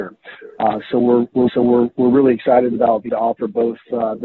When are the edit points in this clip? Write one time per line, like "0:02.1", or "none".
0:01.5
0:03.1